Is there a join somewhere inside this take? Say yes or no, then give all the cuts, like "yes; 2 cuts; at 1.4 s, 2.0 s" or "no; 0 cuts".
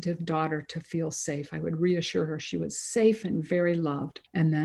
no; 0 cuts